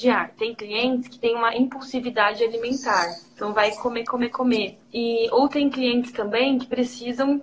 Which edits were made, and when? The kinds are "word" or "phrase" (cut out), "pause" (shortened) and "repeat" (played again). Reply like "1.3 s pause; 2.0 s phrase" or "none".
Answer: 3.3 s pause; 4.8 s pause